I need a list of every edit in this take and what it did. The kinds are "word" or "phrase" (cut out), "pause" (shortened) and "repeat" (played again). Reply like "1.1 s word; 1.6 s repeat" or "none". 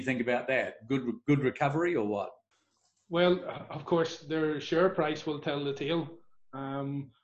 none